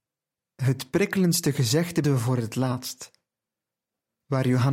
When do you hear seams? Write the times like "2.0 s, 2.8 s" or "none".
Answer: 2.0 s